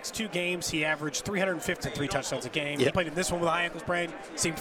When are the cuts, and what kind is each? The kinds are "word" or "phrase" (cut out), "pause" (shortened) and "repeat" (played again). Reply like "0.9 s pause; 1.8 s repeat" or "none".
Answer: 1.8 s word; 2.9 s word